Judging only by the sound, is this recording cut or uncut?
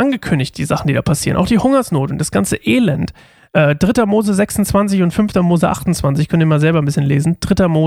uncut